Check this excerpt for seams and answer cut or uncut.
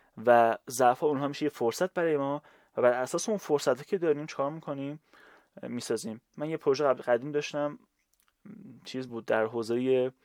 uncut